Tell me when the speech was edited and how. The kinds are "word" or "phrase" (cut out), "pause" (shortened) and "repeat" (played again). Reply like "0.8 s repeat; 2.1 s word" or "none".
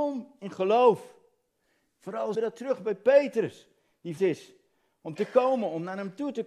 2.3 s word; 4.2 s word

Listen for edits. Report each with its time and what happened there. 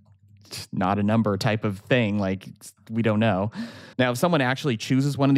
3.9 s pause

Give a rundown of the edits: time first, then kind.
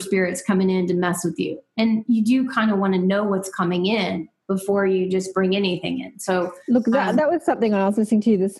none

